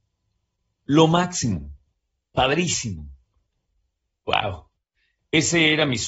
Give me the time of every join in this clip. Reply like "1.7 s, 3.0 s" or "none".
none